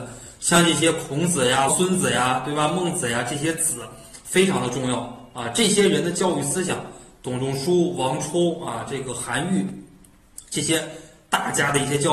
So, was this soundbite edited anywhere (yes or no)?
yes